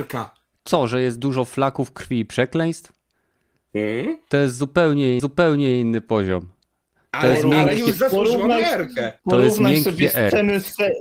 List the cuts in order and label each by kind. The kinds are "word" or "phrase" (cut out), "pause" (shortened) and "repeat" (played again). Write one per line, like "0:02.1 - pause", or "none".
0:05.2 - repeat
0:09.2 - pause